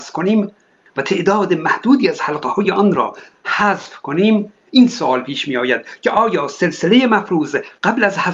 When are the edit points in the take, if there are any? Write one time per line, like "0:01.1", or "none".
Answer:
none